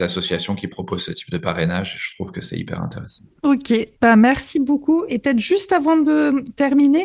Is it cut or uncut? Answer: uncut